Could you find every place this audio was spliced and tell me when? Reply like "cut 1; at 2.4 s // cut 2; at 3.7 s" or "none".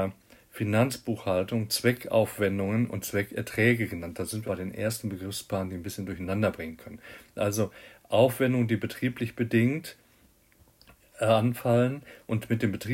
cut 1; at 4.5 s